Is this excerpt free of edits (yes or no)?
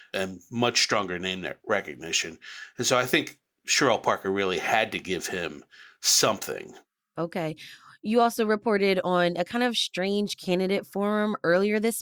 yes